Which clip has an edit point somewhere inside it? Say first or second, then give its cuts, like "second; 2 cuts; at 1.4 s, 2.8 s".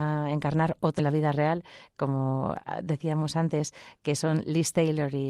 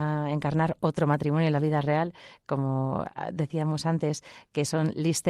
first; 1 cut; at 1.0 s